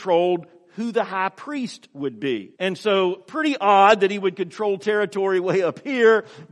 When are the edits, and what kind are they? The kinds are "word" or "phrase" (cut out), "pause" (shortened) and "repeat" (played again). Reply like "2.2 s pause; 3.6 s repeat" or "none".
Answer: 2.5 s pause